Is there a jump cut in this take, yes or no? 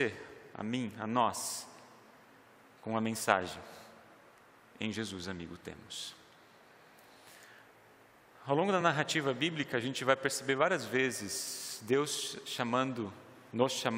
no